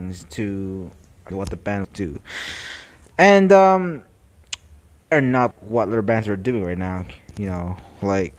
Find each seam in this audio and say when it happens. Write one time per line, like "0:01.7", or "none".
0:01.3
0:01.8
0:05.1
0:05.5